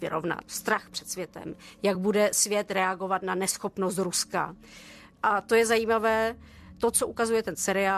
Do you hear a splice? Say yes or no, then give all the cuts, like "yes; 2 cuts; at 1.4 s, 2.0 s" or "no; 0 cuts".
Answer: no; 0 cuts